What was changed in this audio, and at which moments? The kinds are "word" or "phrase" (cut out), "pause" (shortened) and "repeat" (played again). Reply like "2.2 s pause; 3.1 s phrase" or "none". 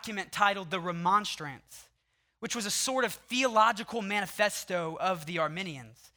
none